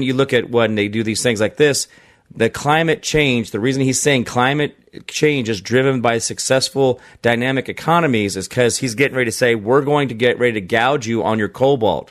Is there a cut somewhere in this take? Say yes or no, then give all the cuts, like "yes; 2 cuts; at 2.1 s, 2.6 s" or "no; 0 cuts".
no; 0 cuts